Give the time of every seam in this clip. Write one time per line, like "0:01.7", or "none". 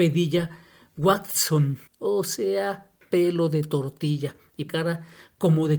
0:01.9
0:04.7